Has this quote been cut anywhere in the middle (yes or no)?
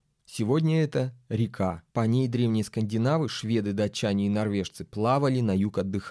yes